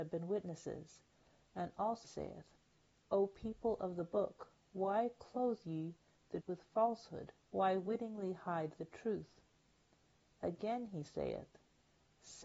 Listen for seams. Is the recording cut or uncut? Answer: cut